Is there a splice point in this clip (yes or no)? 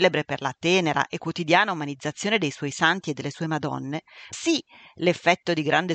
yes